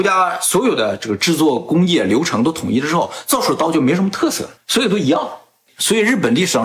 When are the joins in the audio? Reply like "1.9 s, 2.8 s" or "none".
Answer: 4.6 s